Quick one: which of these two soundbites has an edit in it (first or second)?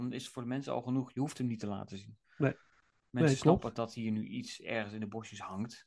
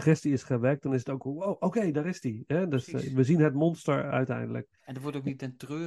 first